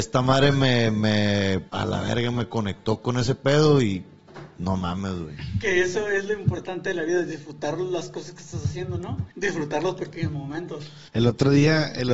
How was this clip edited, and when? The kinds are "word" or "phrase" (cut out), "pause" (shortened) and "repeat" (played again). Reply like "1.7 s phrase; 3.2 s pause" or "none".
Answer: 1.7 s pause; 9.3 s pause; 11.1 s pause

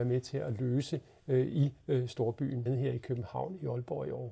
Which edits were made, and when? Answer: 2.7 s word

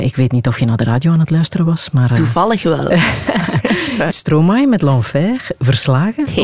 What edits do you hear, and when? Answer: 4.1 s word

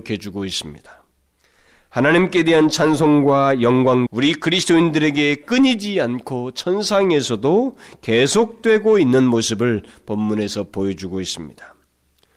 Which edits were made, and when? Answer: 4.1 s word

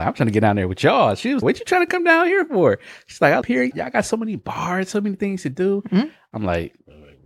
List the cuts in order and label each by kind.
1.4 s word; 3.4 s phrase; 3.7 s word

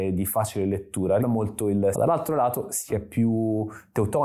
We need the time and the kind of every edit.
1.2 s word; 1.9 s phrase; 2.9 s phrase

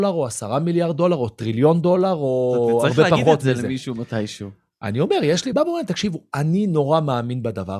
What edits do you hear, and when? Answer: 5.5 s phrase

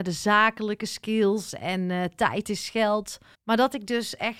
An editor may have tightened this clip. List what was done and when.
3.3 s pause

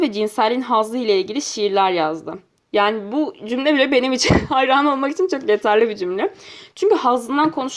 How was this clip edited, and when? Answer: 2.6 s pause

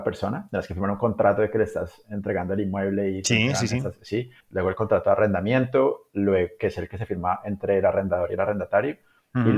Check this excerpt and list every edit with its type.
4.4 s pause

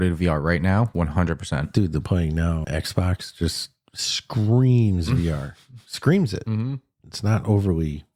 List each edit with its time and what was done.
2.0 s phrase; 2.6 s word

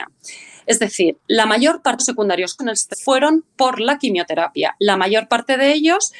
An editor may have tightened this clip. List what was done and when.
2.0 s phrase; 2.6 s word; 2.9 s word

